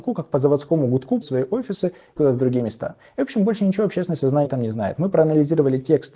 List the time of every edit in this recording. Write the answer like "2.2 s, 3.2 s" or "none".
1.2 s, 2.2 s, 4.4 s